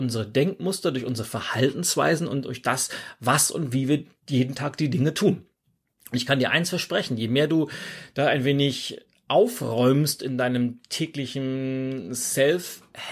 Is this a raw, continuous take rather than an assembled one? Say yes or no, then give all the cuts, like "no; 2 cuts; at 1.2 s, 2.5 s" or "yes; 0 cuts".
yes; 0 cuts